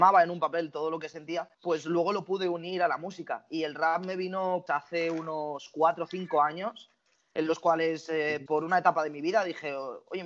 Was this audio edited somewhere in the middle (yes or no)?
yes